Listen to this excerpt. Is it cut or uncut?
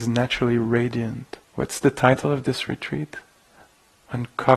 cut